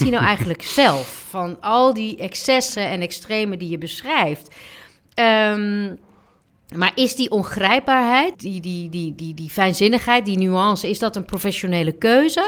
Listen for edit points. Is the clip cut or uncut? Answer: cut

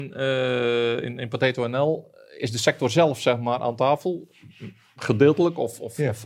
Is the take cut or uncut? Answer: uncut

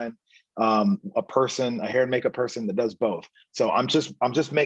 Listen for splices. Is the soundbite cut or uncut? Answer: uncut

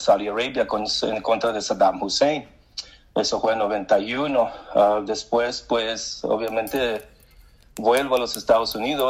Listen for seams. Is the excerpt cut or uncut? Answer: uncut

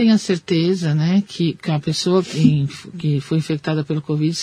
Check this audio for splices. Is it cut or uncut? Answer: uncut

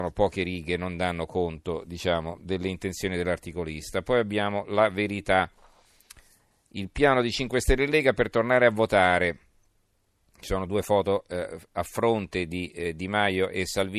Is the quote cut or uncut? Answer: uncut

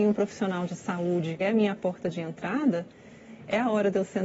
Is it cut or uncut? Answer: cut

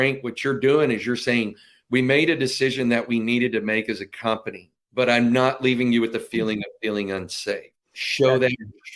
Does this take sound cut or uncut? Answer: uncut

